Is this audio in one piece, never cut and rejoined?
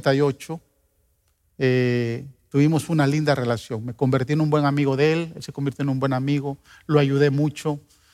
yes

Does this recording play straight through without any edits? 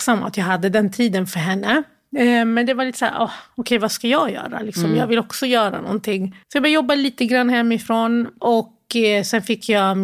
no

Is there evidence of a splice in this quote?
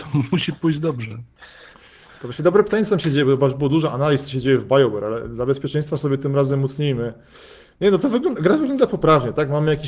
no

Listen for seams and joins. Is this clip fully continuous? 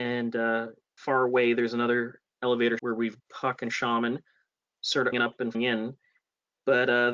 no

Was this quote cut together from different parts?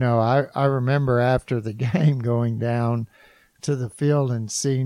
no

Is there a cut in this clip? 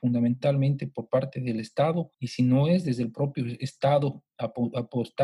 yes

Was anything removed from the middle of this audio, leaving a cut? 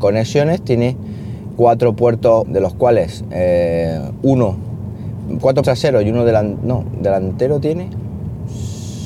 yes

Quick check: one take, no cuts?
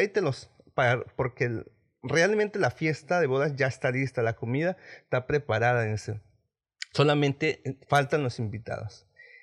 yes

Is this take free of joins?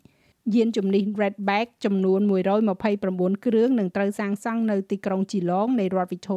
yes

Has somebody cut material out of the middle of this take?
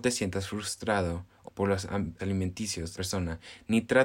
yes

